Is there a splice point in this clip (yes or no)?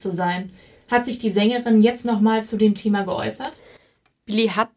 no